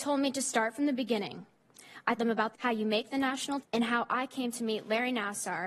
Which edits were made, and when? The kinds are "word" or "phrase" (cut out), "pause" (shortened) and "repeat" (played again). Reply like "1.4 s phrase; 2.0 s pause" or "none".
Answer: 2.2 s word; 2.5 s phrase; 3.6 s word